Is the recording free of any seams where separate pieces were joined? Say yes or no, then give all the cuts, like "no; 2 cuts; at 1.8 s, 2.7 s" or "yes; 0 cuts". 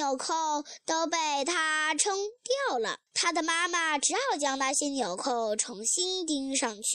no; 1 cut; at 3.1 s